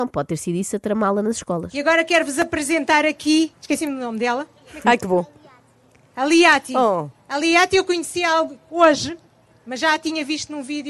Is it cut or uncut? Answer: cut